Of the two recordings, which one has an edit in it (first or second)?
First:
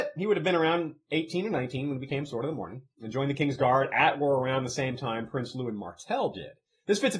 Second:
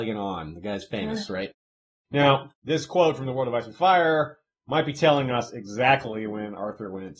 second